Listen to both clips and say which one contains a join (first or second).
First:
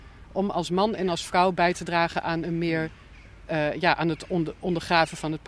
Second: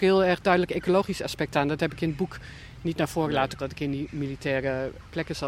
second